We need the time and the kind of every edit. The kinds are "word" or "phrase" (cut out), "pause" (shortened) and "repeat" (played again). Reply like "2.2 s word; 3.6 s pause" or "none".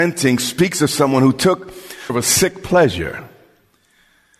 2.1 s word